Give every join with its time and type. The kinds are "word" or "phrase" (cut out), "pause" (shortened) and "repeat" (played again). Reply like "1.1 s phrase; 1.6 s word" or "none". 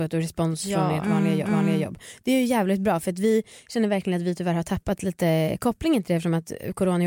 1.4 s repeat